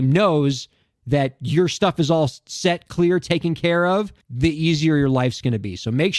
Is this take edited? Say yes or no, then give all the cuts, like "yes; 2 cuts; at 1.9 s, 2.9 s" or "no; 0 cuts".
yes; 1 cut; at 4.2 s